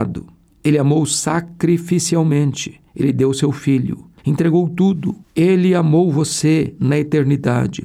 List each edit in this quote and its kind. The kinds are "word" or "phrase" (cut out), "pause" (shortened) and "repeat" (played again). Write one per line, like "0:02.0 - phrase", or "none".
0:02.9 - pause
0:04.2 - pause
0:05.2 - pause